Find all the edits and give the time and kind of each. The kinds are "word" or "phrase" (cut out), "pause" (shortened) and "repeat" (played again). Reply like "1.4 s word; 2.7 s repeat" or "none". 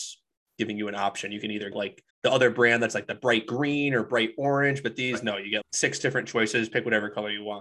1.7 s word; 2.1 s pause; 5.6 s word